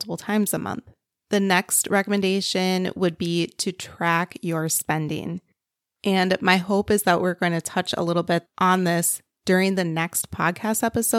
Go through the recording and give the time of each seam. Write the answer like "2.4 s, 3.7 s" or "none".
none